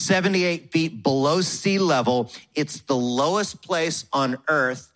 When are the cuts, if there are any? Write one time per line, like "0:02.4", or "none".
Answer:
none